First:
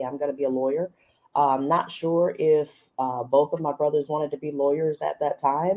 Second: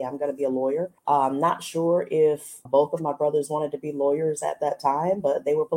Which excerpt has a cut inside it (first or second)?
second